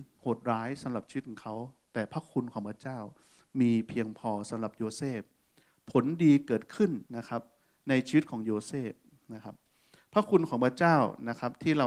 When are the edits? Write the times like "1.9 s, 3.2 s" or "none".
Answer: 7.1 s